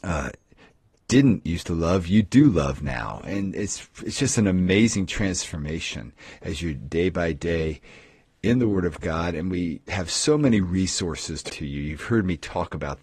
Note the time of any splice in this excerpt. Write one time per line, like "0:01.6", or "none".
0:11.5